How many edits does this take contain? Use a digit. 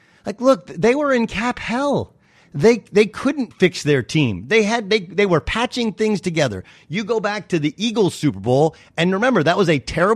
0